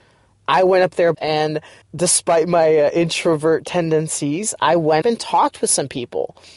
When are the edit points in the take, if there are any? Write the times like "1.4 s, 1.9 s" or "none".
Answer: 1.1 s, 1.8 s, 5.0 s